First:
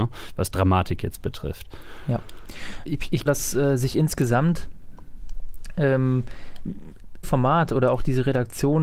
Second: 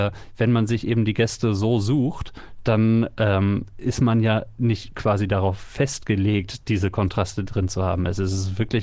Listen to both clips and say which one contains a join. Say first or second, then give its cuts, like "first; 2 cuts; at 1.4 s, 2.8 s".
first; 3 cuts; at 2.8 s, 3.3 s, 7.2 s